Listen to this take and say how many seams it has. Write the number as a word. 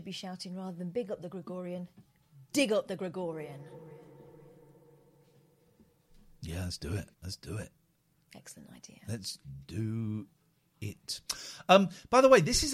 one